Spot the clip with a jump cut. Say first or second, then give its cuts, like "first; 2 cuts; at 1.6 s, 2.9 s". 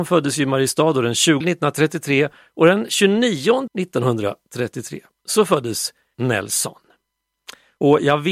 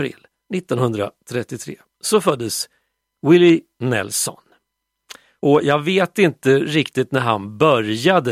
first; 3 cuts; at 1.4 s, 3.7 s, 6.1 s